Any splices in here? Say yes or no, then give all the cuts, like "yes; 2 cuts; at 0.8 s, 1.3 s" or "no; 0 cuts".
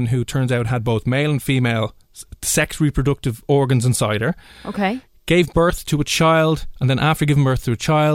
no; 0 cuts